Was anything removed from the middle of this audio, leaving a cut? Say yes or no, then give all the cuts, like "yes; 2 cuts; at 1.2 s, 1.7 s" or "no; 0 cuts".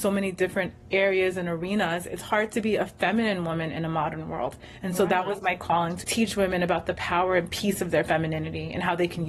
yes; 1 cut; at 6.0 s